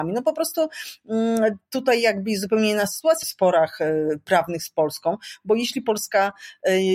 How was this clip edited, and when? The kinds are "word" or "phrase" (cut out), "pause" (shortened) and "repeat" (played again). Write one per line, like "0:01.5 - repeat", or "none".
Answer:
0:03.2 - phrase